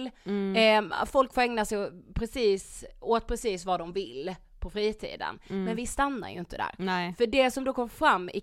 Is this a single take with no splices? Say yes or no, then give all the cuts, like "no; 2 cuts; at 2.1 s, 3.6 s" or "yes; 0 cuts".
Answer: yes; 0 cuts